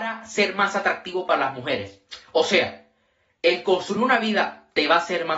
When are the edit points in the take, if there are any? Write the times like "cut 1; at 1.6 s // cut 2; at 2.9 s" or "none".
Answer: none